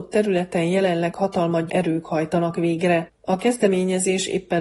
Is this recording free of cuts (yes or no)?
no